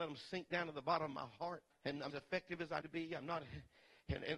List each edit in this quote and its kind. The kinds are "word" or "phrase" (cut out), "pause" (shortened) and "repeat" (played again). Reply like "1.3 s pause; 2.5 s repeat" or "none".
1.7 s pause; 2.1 s phrase; 2.8 s word